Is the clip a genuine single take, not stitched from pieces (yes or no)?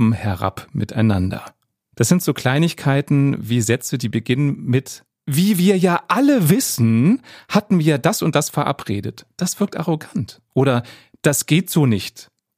yes